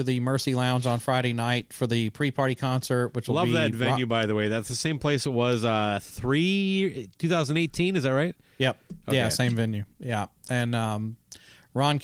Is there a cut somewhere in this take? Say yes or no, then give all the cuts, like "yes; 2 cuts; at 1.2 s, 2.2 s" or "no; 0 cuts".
yes; 1 cut; at 9.9 s